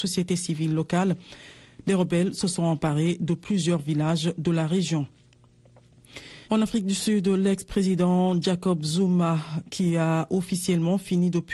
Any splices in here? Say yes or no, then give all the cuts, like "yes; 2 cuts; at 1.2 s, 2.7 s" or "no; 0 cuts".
yes; 1 cut; at 6.4 s